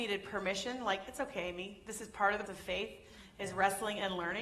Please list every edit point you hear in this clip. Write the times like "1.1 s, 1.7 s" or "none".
2.5 s